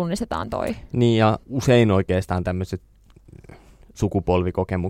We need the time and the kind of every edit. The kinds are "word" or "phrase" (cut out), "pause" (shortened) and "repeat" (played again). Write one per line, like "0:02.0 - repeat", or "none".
0:01.4 - pause